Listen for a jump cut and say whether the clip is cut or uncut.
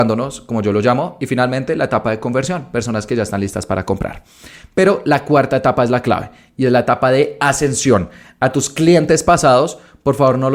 uncut